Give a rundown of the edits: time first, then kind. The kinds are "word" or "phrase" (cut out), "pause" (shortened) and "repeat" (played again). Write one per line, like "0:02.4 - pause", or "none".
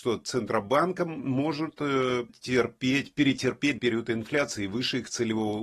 0:02.3 - word
0:03.8 - word